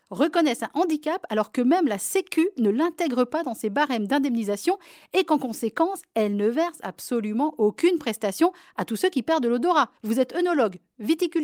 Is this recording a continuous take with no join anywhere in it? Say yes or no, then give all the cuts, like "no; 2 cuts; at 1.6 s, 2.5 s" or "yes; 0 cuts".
no; 1 cut; at 10.0 s